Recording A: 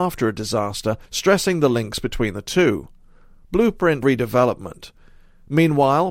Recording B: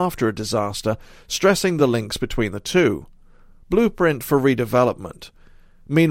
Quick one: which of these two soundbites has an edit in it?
A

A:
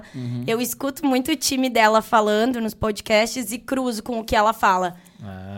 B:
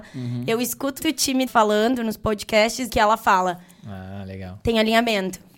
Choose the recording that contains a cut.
B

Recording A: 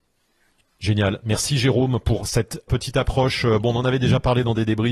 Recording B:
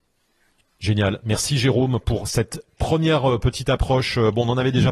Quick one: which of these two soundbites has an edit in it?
A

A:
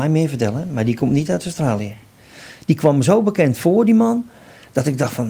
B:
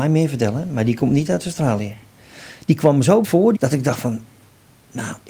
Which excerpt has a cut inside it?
B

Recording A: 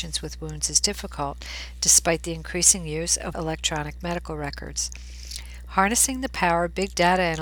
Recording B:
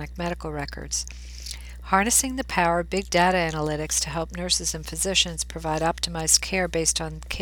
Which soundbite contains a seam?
A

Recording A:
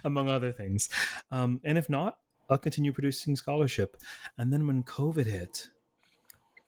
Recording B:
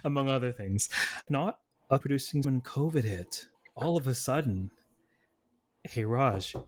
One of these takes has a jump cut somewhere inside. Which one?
B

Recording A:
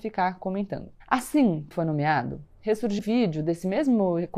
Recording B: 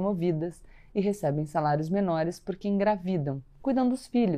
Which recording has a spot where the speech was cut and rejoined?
A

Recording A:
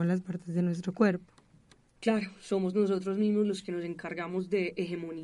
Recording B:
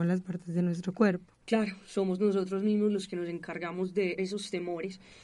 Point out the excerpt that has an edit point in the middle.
B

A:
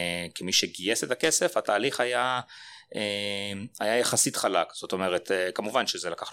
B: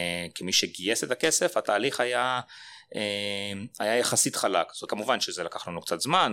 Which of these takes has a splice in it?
B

